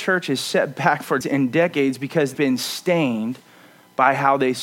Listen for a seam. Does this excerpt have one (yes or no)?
yes